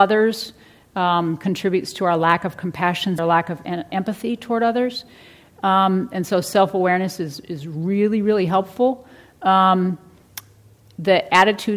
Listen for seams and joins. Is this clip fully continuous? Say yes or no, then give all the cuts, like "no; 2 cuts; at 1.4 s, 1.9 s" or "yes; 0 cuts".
no; 2 cuts; at 3.2 s, 3.9 s